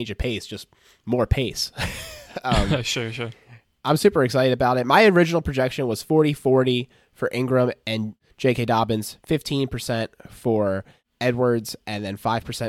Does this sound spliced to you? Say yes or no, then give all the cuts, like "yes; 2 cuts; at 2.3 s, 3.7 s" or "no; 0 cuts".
no; 0 cuts